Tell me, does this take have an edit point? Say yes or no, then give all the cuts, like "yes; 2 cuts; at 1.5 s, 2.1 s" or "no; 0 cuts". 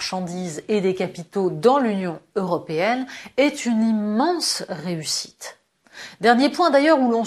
no; 0 cuts